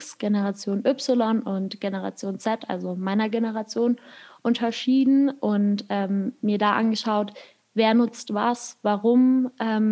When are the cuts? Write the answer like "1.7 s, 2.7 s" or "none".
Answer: none